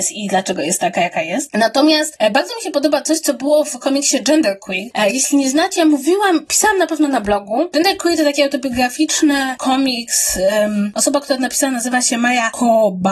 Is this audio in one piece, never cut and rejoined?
yes; 0 cuts

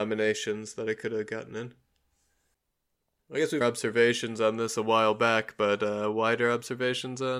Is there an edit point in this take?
yes; 1 cut; at 3.6 s

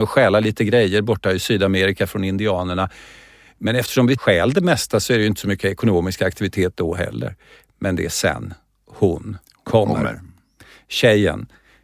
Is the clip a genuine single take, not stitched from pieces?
yes; 0 cuts

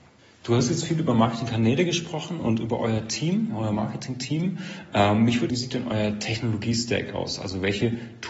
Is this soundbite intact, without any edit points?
no; 1 cut; at 5.5 s

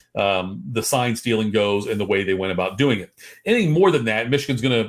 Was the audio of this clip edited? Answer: no; 0 cuts

